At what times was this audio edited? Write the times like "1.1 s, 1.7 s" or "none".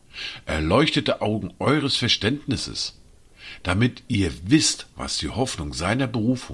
4.9 s